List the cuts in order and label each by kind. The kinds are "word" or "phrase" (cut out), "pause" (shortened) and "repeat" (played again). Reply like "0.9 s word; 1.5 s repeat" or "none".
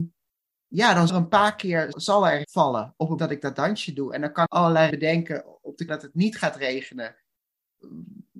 1.1 s word; 1.9 s word; 2.4 s word; 3.2 s word; 4.5 s word; 4.9 s word; 5.9 s word